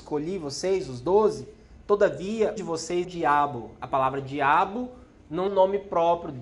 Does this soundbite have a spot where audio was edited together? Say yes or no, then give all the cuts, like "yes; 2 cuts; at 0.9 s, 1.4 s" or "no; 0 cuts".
yes; 3 cuts; at 2.6 s, 3.0 s, 5.5 s